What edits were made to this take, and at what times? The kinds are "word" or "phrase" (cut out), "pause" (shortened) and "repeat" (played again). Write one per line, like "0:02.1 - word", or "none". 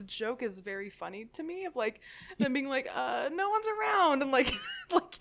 none